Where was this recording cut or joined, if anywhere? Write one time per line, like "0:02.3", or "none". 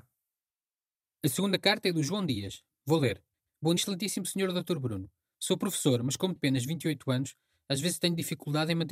0:03.8
0:06.4